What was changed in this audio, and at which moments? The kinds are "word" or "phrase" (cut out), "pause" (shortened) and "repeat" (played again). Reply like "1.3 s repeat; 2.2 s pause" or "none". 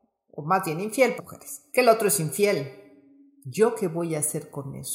1.2 s phrase; 1.7 s pause